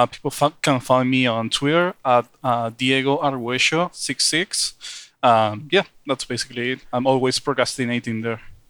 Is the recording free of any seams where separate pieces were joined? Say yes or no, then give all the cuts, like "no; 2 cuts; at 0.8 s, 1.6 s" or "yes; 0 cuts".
yes; 0 cuts